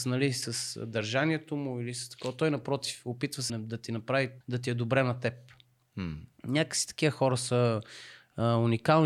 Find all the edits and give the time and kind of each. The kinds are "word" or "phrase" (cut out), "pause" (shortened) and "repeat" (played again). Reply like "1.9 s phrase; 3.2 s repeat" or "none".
3.5 s word; 4.4 s pause

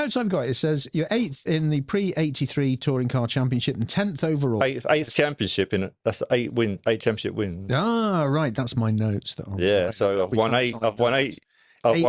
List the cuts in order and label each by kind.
none

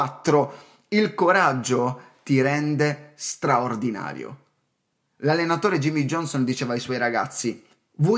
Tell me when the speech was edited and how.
none

